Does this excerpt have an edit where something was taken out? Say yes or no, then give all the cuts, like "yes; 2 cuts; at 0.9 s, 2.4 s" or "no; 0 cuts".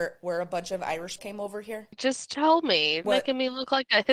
yes; 2 cuts; at 1.2 s, 3.0 s